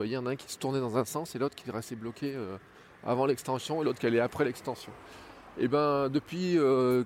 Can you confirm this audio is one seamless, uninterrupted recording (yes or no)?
yes